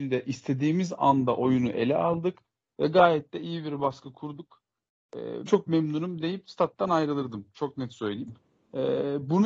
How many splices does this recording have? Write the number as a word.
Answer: one